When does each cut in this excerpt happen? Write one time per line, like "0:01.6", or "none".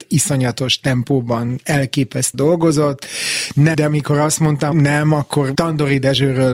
0:02.3
0:03.7
0:04.7
0:05.5